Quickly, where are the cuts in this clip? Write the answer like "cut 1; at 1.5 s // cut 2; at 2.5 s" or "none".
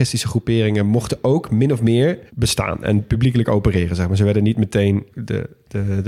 cut 1; at 2.3 s // cut 2; at 5.1 s